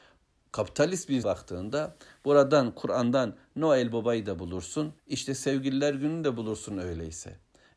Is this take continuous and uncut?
no; 2 cuts; at 1.2 s, 5.0 s

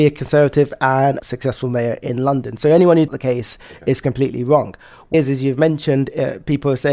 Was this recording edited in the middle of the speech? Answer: yes; 3 cuts; at 1.2 s, 3.1 s, 5.1 s

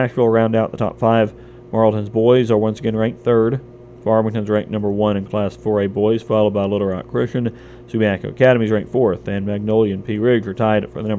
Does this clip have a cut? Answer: no; 0 cuts

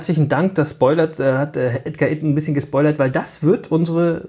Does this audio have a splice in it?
no; 0 cuts

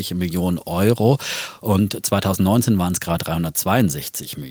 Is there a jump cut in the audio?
yes; 1 cut; at 3.2 s

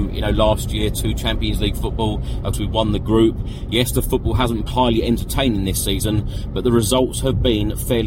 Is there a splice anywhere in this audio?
yes; 2 cuts; at 2.5 s, 4.7 s

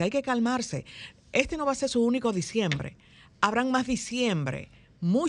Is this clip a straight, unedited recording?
yes; 0 cuts

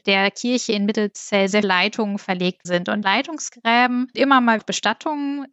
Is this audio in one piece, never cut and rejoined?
no; 5 cuts; at 1.6 s, 2.6 s, 3.0 s, 4.1 s, 4.6 s

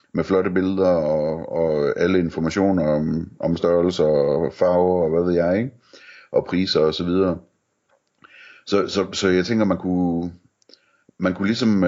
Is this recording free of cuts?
yes; 0 cuts

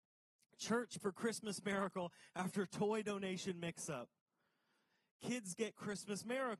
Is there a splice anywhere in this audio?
yes; 1 cut; at 1.0 s

